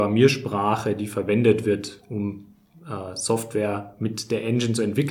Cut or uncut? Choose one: uncut